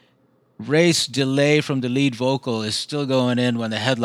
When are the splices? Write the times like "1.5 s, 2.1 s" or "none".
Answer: none